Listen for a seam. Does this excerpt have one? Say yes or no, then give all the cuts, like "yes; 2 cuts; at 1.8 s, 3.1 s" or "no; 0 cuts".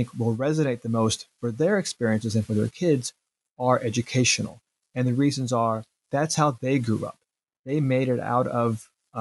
no; 0 cuts